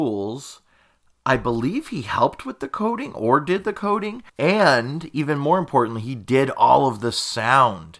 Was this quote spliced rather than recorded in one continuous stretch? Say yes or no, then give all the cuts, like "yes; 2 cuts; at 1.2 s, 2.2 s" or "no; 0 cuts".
yes; 1 cut; at 4.3 s